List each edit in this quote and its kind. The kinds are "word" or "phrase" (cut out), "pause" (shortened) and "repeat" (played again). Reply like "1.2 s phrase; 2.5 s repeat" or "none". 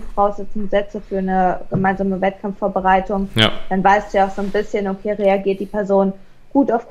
none